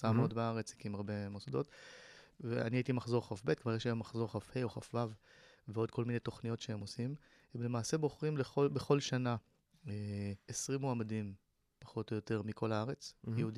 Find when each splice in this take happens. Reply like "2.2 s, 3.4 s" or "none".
none